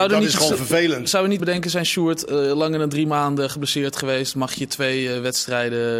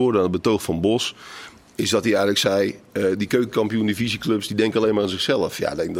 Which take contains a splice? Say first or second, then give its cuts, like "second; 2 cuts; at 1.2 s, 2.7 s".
first; 1 cut; at 1.4 s